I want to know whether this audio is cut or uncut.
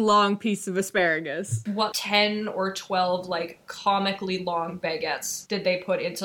cut